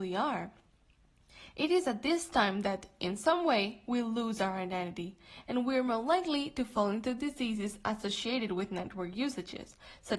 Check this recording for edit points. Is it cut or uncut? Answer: uncut